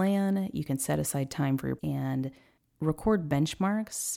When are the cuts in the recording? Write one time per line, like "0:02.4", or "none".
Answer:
0:01.8